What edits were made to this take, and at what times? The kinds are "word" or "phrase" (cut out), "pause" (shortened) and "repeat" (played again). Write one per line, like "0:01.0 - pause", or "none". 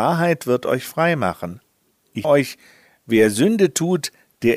0:02.2 - word